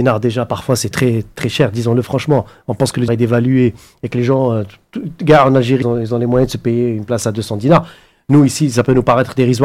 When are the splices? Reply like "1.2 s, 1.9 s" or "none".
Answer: 0.9 s, 3.1 s, 5.8 s

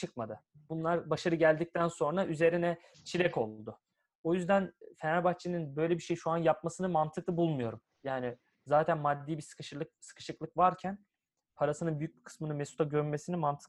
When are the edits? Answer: none

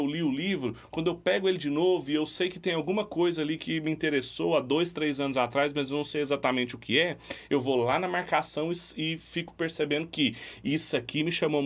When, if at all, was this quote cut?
none

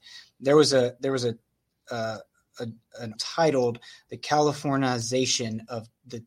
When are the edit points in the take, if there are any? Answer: 3.2 s

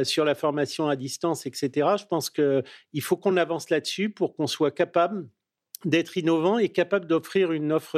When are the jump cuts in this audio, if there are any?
none

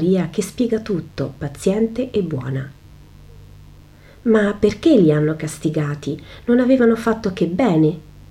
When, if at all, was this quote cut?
none

